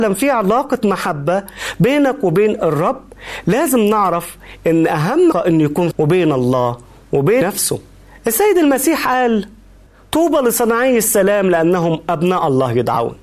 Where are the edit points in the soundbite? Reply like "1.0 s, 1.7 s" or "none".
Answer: 5.3 s, 5.9 s, 7.4 s